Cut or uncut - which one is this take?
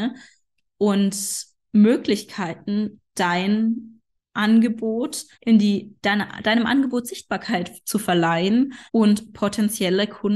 cut